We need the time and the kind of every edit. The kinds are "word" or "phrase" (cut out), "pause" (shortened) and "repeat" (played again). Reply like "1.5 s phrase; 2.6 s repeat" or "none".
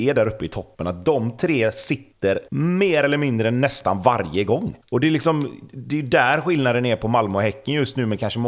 2.5 s pause; 4.8 s pause